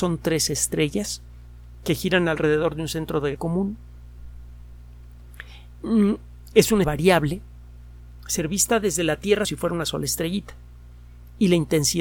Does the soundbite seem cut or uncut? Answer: cut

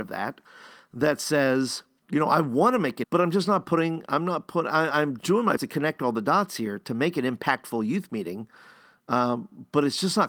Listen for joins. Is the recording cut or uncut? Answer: cut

